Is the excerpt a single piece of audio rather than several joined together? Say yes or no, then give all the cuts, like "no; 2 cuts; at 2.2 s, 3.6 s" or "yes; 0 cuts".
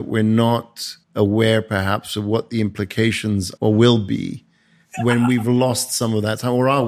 no; 2 cuts; at 1.0 s, 3.6 s